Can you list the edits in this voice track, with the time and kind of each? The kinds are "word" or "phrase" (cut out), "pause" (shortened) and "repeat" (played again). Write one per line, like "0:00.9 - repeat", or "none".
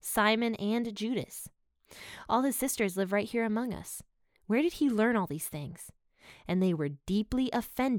none